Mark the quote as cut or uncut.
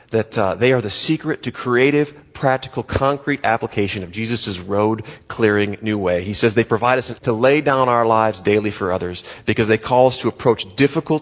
cut